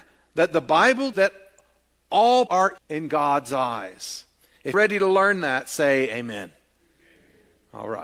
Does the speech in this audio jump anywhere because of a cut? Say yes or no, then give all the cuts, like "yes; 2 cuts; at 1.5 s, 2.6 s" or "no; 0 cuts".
yes; 4 cuts; at 1.1 s, 2.5 s, 2.8 s, 4.7 s